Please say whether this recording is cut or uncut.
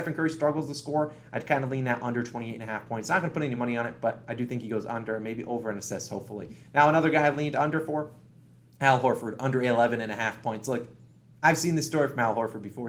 uncut